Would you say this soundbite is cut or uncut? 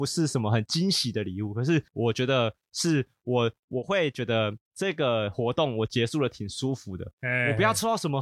cut